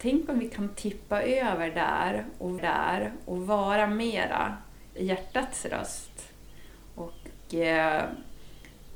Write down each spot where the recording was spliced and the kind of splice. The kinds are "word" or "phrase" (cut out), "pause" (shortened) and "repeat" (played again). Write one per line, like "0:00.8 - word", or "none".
0:02.6 - repeat
0:05.0 - word

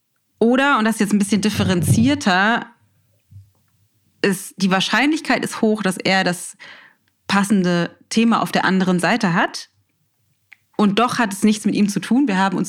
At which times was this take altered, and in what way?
none

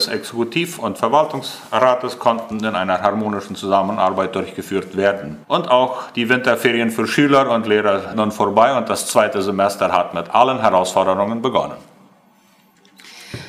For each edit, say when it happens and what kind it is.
0:05.4 - pause
0:08.1 - word

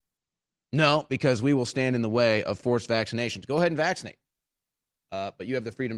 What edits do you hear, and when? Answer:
none

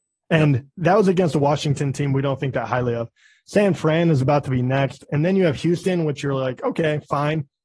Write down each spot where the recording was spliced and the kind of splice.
none

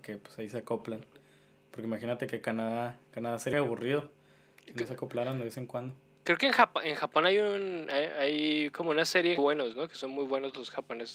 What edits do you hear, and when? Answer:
0:03.5 - word
0:09.4 - phrase

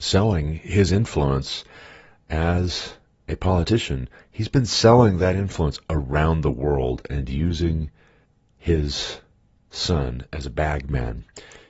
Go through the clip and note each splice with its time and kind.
none

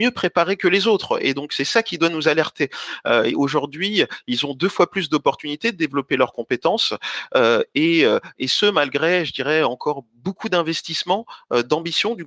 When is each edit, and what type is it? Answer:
none

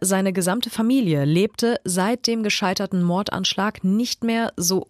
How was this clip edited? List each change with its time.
none

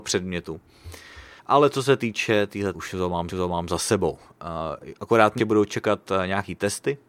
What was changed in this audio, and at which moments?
0:01.4 - pause
0:02.7 - phrase
0:03.3 - repeat
0:05.4 - word

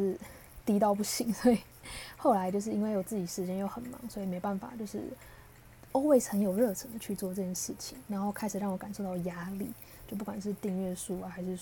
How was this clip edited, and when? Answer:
none

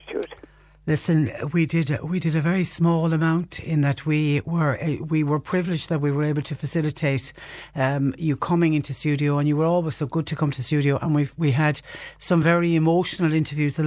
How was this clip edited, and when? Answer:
none

